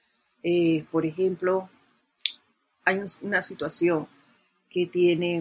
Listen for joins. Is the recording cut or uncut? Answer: uncut